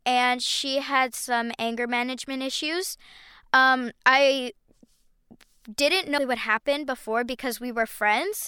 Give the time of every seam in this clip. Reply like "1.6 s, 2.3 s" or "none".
4.0 s, 6.2 s